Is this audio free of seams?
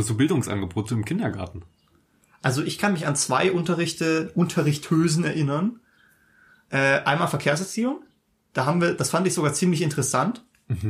yes; 0 cuts

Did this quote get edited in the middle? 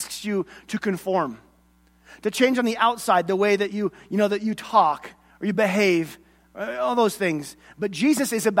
no; 0 cuts

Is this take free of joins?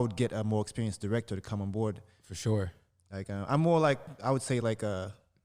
yes; 0 cuts

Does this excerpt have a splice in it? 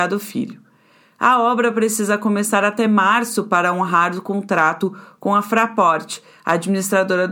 no; 0 cuts

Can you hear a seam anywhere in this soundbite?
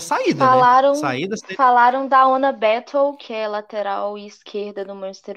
no; 0 cuts

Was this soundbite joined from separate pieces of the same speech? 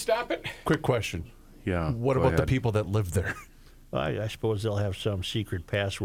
no; 0 cuts

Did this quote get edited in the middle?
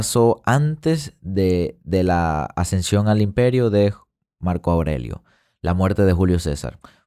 no; 0 cuts

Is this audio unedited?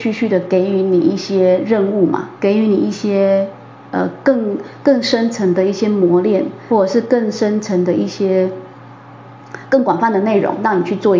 no; 2 cuts; at 2.4 s, 6.7 s

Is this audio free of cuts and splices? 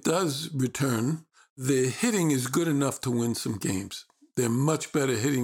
yes; 0 cuts

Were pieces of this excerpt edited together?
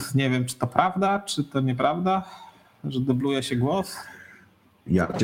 no; 0 cuts

